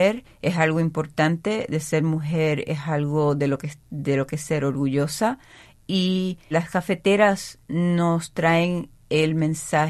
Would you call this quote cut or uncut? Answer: cut